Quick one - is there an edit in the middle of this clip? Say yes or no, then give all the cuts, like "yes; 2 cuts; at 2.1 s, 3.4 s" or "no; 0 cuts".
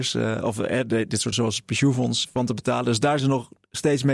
yes; 3 cuts; at 1.3 s, 2.2 s, 3.2 s